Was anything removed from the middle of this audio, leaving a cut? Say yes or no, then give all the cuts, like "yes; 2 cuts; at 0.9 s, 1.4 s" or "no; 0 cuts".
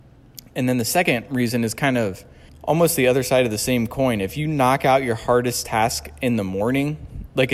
yes; 1 cut; at 2.5 s